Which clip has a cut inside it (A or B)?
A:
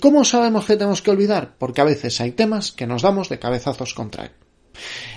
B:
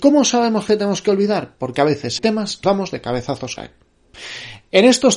B